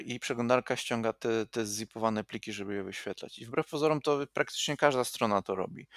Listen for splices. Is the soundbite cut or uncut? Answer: uncut